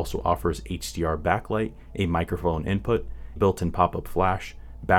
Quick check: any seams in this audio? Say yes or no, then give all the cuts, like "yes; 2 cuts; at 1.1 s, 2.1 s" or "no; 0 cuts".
yes; 1 cut; at 3.4 s